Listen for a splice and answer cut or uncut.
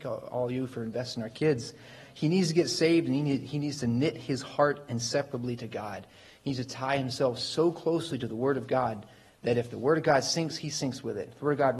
uncut